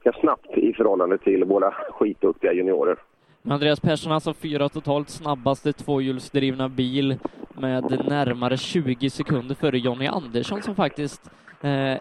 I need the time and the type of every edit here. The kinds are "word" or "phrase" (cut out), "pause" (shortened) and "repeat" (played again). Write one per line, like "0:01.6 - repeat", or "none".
none